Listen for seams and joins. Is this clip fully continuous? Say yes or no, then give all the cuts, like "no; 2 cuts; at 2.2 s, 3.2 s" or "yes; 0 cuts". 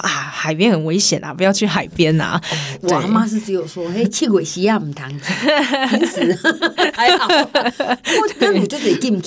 yes; 0 cuts